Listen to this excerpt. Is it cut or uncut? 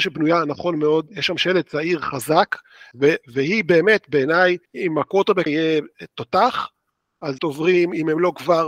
cut